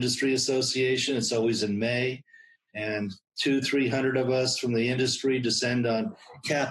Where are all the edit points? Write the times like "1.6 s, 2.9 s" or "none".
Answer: none